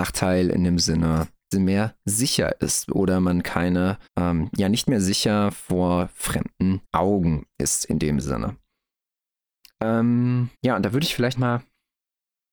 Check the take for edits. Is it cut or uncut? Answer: cut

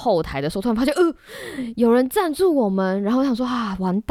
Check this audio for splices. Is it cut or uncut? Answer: uncut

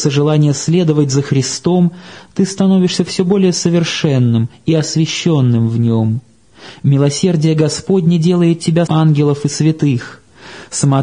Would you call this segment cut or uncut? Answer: cut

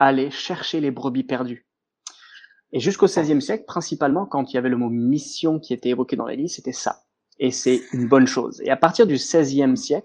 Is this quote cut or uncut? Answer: uncut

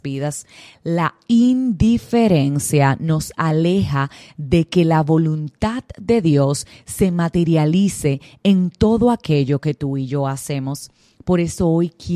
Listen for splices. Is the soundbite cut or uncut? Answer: uncut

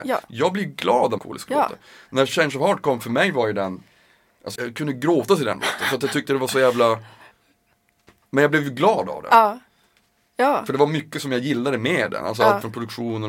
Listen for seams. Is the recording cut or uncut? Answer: cut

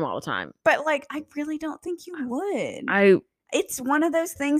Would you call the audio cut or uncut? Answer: uncut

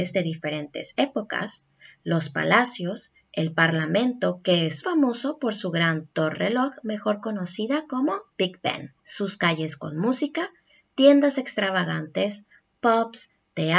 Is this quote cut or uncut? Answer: cut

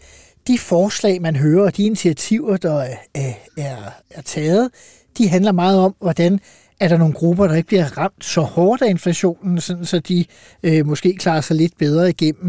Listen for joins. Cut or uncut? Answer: cut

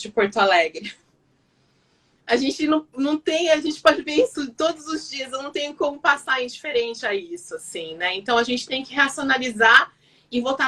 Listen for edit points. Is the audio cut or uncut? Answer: uncut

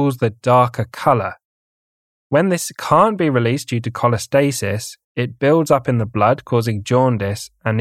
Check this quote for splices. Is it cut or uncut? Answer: cut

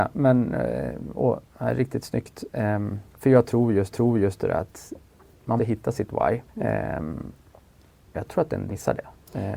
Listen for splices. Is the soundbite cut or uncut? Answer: cut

